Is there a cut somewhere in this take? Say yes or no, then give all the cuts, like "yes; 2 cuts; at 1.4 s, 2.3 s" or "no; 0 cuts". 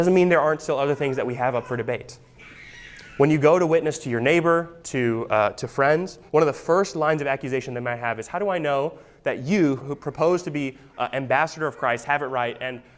yes; 3 cuts; at 4.8 s, 6.3 s, 9.8 s